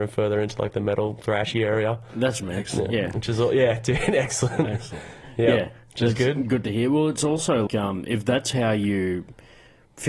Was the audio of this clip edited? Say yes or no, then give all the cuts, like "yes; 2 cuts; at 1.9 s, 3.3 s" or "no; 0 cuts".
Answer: yes; 2 cuts; at 2.4 s, 7.7 s